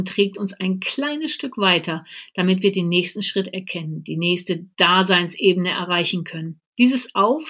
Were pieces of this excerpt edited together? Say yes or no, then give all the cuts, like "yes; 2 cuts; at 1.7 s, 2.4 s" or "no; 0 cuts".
no; 0 cuts